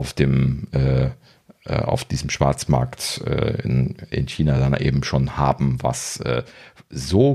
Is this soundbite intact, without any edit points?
yes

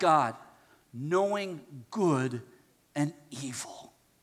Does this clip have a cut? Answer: no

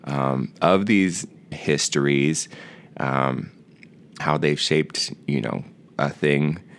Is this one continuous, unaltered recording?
no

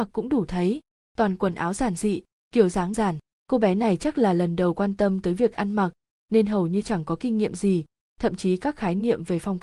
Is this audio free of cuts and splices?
no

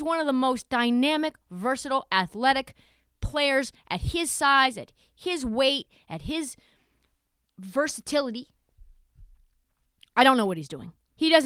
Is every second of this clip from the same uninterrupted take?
yes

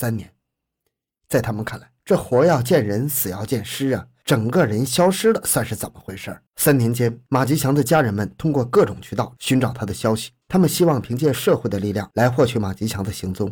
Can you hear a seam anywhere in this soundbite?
yes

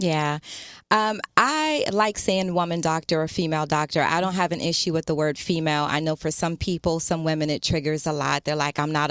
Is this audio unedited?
yes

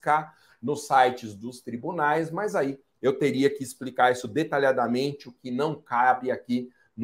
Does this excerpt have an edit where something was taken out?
no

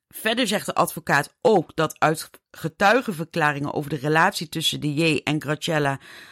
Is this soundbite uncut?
yes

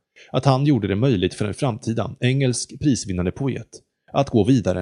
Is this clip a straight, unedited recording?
yes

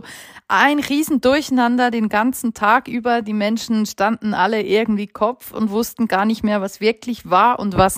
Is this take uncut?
yes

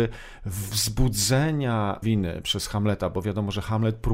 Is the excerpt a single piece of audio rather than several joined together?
no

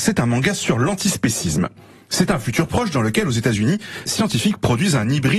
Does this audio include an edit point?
yes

